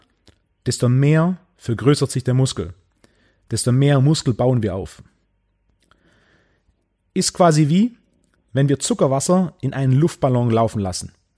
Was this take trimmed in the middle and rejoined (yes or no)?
no